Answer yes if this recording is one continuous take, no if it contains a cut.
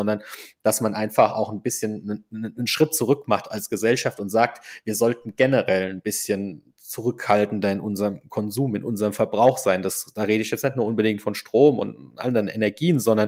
yes